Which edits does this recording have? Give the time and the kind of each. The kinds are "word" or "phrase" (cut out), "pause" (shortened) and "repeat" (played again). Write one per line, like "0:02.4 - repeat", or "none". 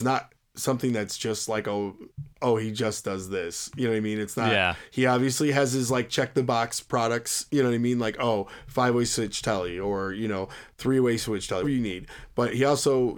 0:11.6 - word

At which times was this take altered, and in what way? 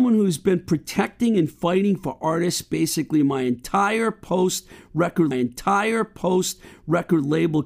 0:05.3 - repeat

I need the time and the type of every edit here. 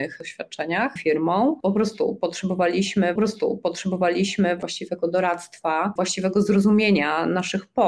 0:01.0 - phrase
0:03.2 - repeat
0:06.0 - word

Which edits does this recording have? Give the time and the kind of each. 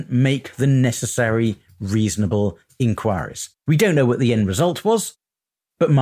0:03.6 - pause

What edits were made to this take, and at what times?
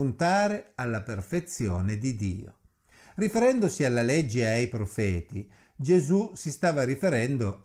none

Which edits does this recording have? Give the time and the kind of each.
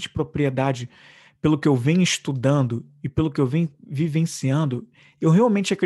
none

